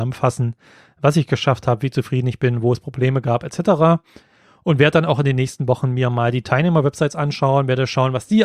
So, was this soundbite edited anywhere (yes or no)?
no